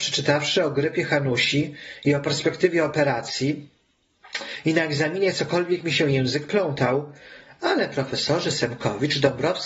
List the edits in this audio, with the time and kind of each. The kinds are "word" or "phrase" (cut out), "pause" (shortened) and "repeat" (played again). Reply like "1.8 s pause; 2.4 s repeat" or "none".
none